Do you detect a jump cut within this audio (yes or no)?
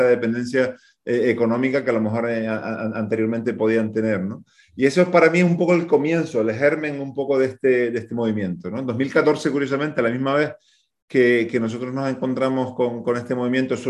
no